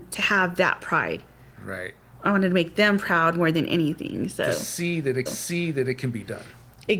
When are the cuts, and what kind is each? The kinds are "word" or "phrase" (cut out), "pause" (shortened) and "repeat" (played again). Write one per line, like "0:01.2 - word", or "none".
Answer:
0:05.3 - repeat